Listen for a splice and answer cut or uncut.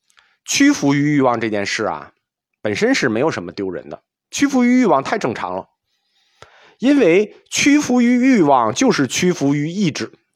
uncut